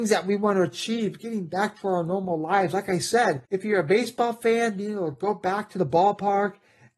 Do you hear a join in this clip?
yes; 1 cut; at 3.5 s

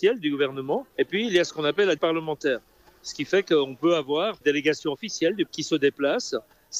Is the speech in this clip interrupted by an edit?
yes; 4 cuts; at 0.9 s, 2.0 s, 4.4 s, 5.5 s

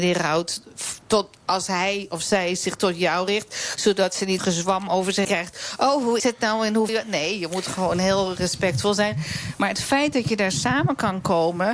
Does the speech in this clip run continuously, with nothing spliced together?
no; 4 cuts; at 4.4 s, 5.2 s, 6.2 s, 6.9 s

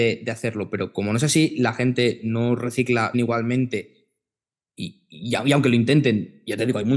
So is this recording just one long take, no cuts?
no; 1 cut; at 3.1 s

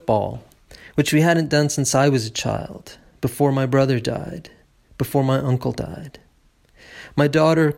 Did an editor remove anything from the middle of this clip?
no; 0 cuts

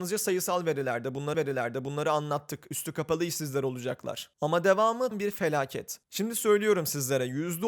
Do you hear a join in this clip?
yes; 2 cuts; at 1.3 s, 5.1 s

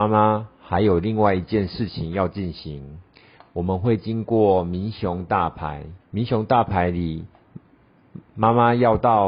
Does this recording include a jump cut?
yes; 1 cut; at 6.0 s

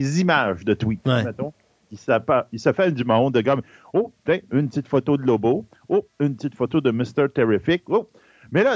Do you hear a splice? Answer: no; 0 cuts

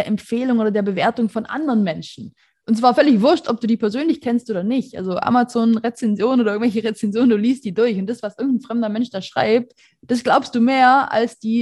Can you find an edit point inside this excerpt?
no; 0 cuts

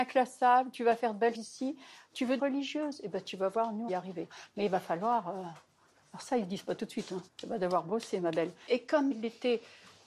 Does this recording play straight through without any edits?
no; 5 cuts; at 1.3 s, 2.4 s, 3.9 s, 7.3 s, 9.1 s

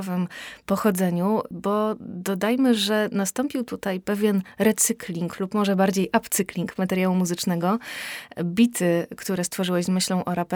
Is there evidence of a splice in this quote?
no; 0 cuts

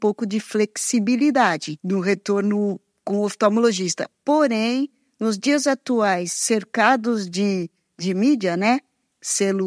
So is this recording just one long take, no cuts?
yes; 0 cuts

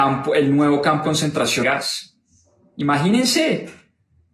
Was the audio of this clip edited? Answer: yes; 2 cuts; at 1.0 s, 1.6 s

